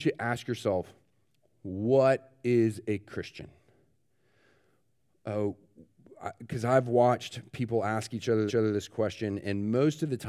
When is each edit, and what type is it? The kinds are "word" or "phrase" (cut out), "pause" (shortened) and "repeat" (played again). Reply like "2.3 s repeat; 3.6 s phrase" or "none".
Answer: 8.5 s repeat